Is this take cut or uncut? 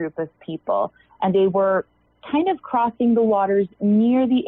uncut